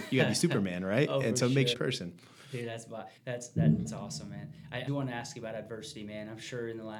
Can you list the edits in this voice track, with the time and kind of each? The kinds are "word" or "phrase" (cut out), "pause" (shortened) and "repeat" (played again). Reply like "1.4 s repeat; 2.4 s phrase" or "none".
1.7 s phrase; 3.2 s pause; 3.8 s word; 4.9 s word